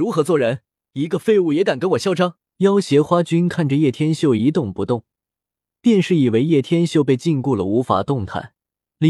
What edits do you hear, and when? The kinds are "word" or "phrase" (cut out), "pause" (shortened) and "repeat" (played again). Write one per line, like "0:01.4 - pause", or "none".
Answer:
0:02.4 - pause